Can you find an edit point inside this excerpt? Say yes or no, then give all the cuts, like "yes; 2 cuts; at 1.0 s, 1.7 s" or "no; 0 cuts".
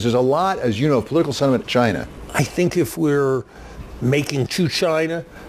yes; 2 cuts; at 1.6 s, 4.5 s